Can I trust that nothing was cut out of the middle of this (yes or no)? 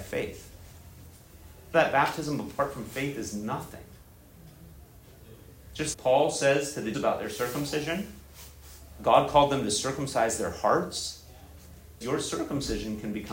no